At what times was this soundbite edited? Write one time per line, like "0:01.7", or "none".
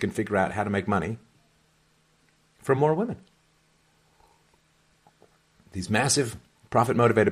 none